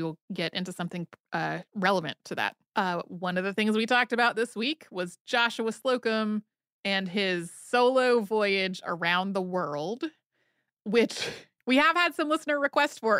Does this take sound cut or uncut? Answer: cut